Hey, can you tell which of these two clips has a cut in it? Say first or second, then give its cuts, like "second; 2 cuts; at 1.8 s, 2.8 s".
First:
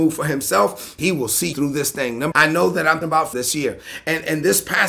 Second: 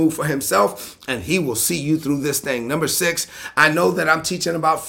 first; 5 cuts; at 1.0 s, 1.5 s, 2.3 s, 3.0 s, 3.3 s